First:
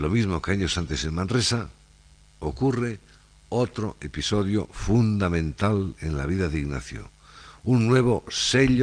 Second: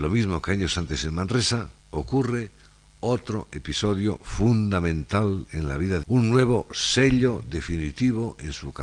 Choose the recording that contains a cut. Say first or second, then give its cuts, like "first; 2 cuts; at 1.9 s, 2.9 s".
second; 2 cuts; at 1.8 s, 6.0 s